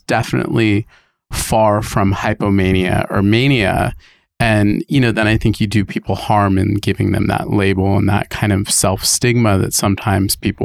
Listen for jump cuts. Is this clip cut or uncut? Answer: uncut